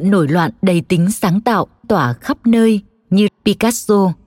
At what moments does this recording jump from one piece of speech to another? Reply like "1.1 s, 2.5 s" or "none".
1.8 s, 3.3 s